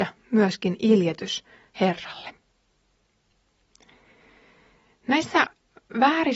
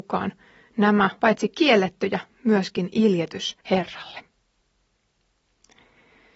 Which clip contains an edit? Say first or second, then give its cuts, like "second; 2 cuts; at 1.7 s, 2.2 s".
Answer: second; 2 cuts; at 1.2 s, 3.6 s